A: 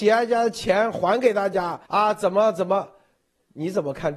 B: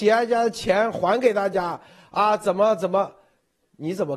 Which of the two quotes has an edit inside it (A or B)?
A